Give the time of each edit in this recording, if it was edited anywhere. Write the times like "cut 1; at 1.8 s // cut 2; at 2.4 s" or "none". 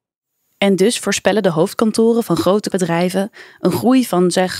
cut 1; at 2.7 s